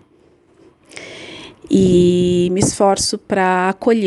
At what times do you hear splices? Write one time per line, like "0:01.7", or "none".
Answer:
none